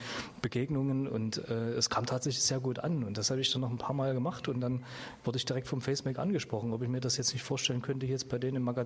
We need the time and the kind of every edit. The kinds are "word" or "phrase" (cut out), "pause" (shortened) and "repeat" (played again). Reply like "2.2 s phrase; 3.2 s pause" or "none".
none